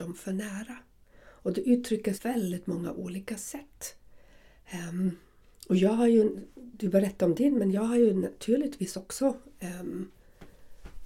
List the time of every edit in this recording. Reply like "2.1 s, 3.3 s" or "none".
2.1 s, 5.4 s